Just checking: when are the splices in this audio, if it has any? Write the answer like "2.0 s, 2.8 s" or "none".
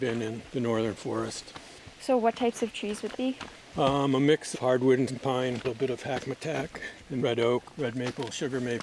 3.1 s, 4.5 s, 5.1 s, 5.6 s, 7.2 s

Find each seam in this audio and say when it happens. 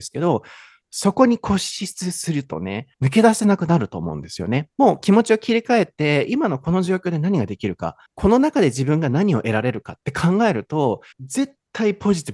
2.9 s, 4.7 s, 8.1 s, 11.1 s

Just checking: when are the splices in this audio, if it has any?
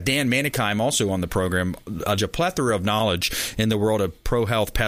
2.2 s

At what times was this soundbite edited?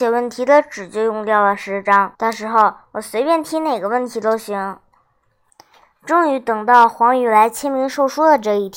2.1 s, 5.5 s

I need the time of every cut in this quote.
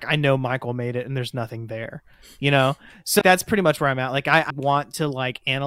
3.2 s, 4.5 s

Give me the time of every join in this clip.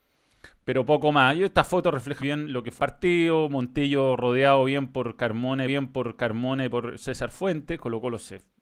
2.2 s, 2.8 s, 5.7 s

